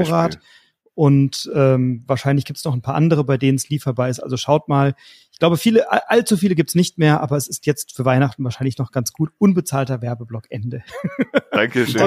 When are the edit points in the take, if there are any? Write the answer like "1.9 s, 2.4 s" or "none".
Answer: none